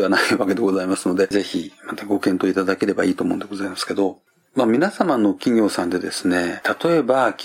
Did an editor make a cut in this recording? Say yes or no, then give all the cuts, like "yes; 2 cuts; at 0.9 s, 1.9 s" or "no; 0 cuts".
no; 0 cuts